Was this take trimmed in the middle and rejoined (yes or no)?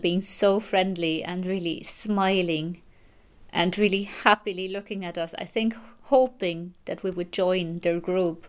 no